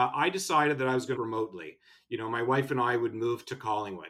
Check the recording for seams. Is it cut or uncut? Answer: cut